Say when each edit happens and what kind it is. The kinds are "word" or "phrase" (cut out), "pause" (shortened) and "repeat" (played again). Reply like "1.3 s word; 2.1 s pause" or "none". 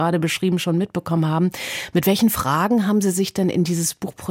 none